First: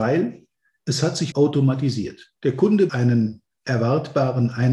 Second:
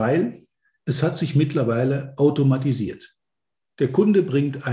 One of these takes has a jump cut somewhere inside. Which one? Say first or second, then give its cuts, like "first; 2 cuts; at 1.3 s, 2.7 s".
first; 3 cuts; at 1.3 s, 2.4 s, 2.9 s